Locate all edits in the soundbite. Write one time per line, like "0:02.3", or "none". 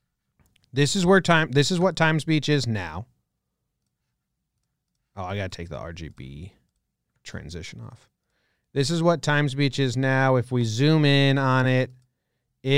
none